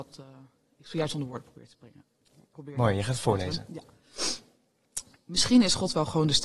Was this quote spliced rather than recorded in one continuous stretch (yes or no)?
no